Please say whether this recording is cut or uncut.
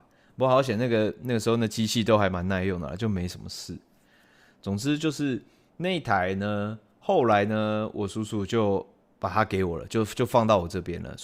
uncut